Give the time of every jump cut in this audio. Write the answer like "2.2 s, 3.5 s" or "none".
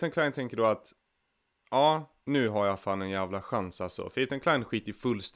2.2 s

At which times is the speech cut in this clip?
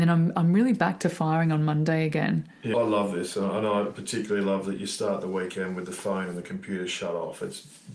2.7 s

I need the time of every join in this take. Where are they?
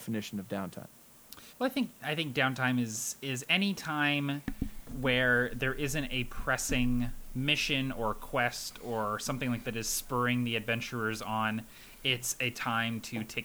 1.5 s, 9.6 s

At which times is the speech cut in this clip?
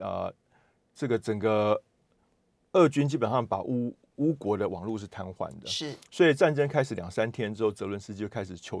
none

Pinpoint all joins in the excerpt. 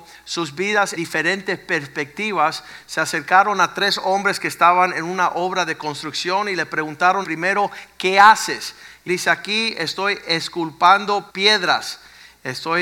1.0 s, 7.2 s, 9.1 s, 11.3 s

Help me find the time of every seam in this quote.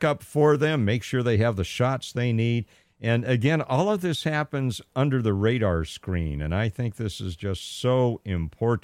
none

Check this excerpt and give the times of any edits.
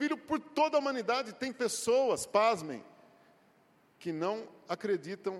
none

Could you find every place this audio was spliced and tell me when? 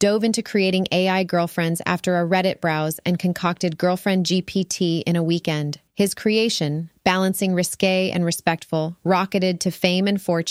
5.9 s

